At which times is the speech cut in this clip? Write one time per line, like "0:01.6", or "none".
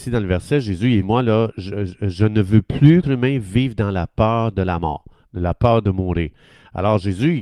0:01.0
0:03.0